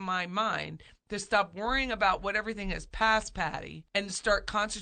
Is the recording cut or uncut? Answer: cut